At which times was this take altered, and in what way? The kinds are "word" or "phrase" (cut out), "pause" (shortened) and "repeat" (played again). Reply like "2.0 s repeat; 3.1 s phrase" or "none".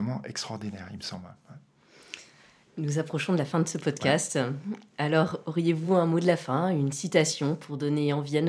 none